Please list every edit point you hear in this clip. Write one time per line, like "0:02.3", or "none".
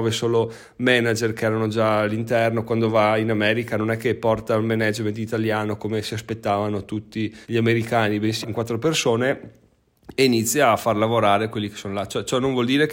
0:07.4
0:08.4